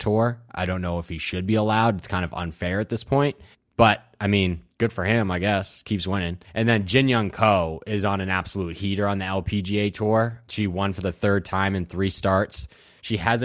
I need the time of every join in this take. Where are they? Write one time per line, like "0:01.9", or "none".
0:03.5
0:04.7
0:06.4

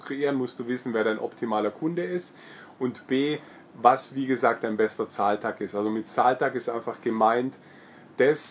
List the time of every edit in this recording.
none

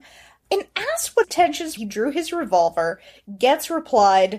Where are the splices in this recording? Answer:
0:01.2
0:01.8

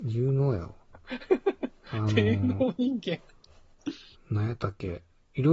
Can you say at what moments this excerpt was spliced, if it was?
0:04.1

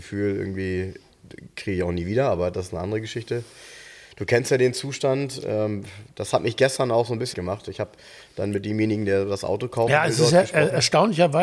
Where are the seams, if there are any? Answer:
0:07.3

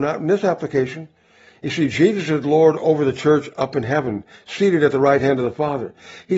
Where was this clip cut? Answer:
none

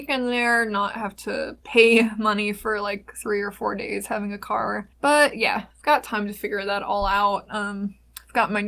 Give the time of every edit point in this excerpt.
0:01.6
0:04.9
0:05.7

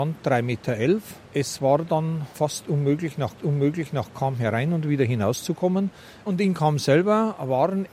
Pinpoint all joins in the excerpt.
0:01.3
0:03.4

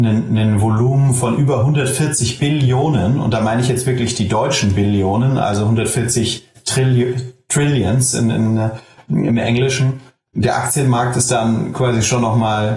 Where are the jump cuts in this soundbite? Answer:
none

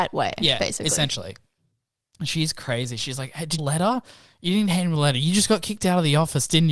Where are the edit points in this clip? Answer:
0:03.6

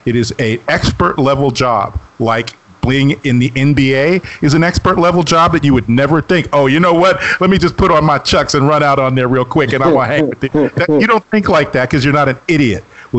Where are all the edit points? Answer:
none

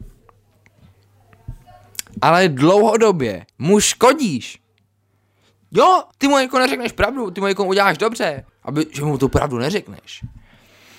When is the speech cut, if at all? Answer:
0:03.5
0:06.1
0:08.5

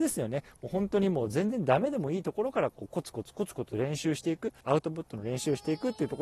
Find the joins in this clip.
0:04.6

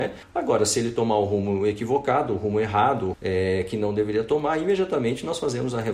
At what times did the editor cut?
0:03.1

